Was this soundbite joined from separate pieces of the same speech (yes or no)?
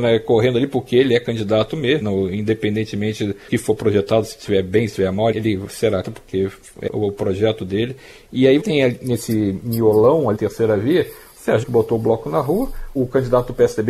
yes